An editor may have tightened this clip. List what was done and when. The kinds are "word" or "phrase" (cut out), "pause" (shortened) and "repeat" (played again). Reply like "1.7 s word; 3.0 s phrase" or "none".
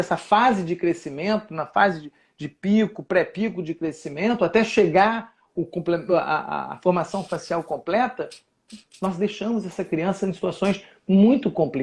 none